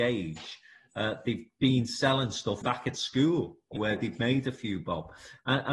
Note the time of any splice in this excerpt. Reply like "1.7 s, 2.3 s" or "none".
2.6 s, 3.8 s